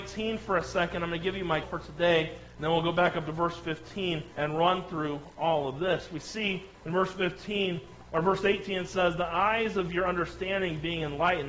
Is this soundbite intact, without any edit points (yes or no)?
no